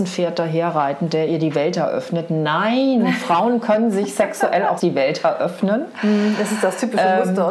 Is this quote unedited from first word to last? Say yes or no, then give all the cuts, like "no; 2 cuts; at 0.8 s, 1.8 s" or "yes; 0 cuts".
no; 1 cut; at 4.8 s